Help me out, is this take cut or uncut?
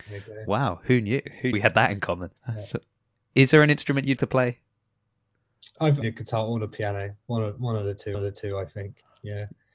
cut